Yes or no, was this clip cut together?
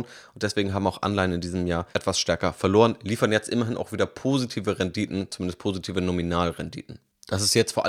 yes